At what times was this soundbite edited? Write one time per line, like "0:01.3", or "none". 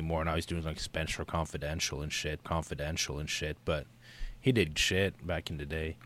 0:02.4
0:04.7